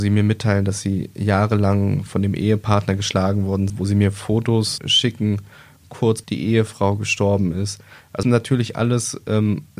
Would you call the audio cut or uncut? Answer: cut